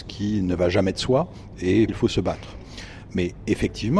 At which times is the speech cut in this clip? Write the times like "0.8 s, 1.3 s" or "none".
1.9 s